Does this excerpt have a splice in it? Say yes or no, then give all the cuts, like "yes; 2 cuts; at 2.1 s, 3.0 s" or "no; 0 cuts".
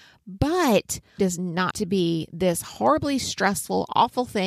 yes; 2 cuts; at 1.2 s, 1.7 s